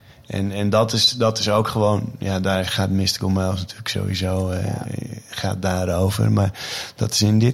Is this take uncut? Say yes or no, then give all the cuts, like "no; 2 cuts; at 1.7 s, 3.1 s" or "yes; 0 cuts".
yes; 0 cuts